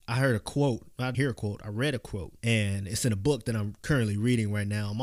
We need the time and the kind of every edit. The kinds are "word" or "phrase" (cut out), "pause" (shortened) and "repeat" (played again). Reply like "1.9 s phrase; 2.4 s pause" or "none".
1.1 s word; 2.4 s pause